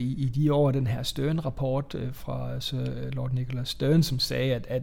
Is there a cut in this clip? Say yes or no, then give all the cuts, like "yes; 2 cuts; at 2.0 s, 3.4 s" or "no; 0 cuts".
yes; 1 cut; at 2.2 s